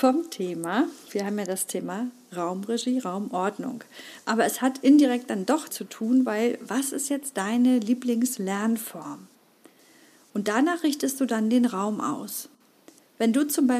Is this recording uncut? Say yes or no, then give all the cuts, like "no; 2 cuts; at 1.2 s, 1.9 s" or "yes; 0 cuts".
no; 1 cut; at 5.7 s